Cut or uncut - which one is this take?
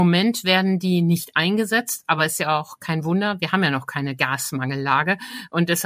uncut